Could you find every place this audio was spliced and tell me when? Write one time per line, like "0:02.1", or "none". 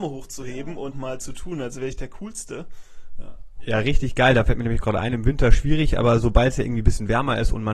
0:00.9